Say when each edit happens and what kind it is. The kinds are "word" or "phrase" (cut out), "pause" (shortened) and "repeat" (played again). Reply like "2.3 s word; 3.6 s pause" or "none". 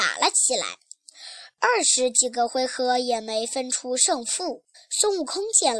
4.7 s pause